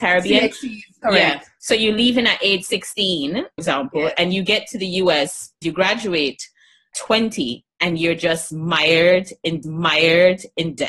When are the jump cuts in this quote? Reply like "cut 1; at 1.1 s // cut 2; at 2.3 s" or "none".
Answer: cut 1; at 3.6 s // cut 2; at 5.6 s // cut 3; at 6.9 s // cut 4; at 9.6 s